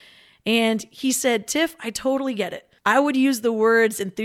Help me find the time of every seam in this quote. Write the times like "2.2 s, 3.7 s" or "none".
2.8 s

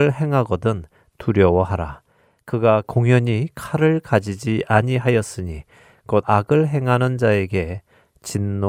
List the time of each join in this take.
6.2 s

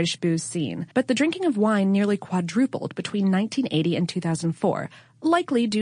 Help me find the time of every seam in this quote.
0.9 s

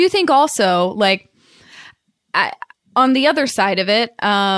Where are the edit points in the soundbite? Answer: none

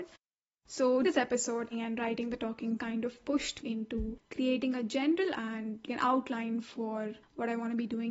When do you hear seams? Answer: 1.0 s, 1.7 s, 2.8 s, 3.6 s, 5.3 s, 5.9 s

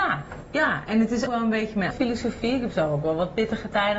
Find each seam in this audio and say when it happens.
1.3 s, 1.9 s

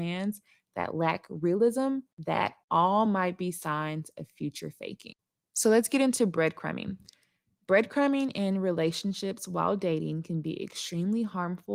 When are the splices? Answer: none

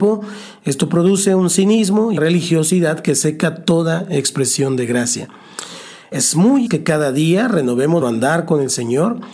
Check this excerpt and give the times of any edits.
2.2 s, 6.7 s, 8.0 s

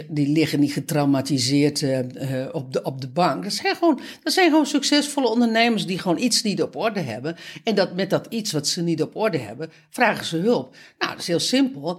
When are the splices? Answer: none

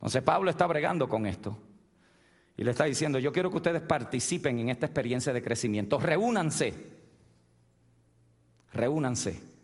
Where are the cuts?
none

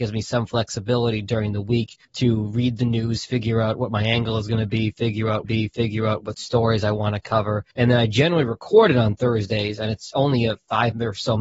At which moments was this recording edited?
2.0 s, 5.4 s, 7.7 s

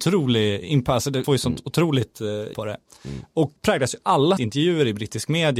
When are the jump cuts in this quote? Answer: 1.2 s, 2.5 s, 3.6 s, 4.4 s

